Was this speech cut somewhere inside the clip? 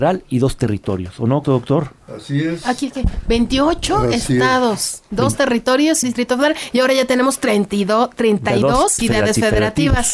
yes; 3 cuts; at 1.4 s, 6.0 s, 9.0 s

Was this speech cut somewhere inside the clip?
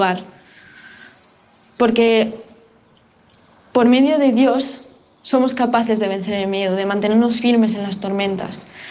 no; 0 cuts

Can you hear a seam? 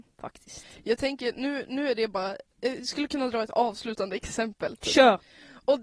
yes; 1 cut; at 2.5 s

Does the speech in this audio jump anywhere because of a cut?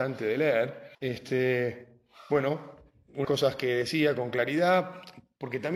yes; 2 cuts; at 0.9 s, 3.2 s

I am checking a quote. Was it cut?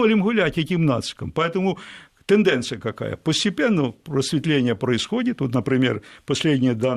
no; 0 cuts

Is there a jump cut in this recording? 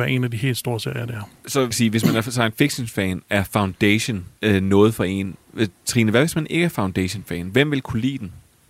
yes; 2 cuts; at 1.7 s, 4.4 s

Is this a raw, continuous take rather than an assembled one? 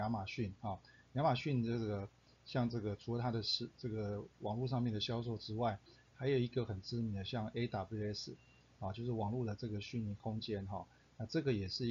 yes; 0 cuts

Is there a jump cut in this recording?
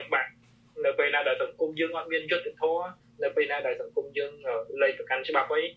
no; 0 cuts

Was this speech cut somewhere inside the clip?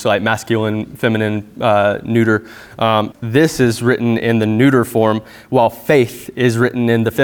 yes; 1 cut; at 3.1 s

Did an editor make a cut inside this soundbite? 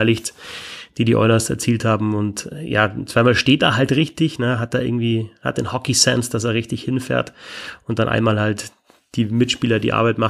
no; 0 cuts

